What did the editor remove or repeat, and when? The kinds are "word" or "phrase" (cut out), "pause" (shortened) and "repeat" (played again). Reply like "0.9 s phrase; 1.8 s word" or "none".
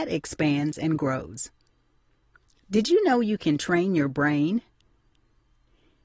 none